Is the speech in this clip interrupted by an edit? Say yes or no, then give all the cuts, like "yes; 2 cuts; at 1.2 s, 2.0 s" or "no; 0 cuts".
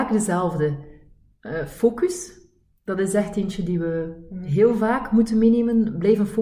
no; 0 cuts